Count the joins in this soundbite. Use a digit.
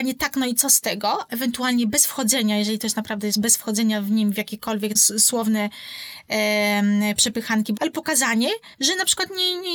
5